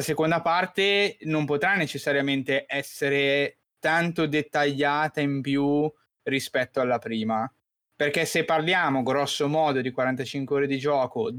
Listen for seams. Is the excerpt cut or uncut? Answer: uncut